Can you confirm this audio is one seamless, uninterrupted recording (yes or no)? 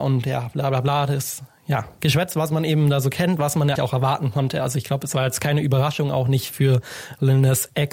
no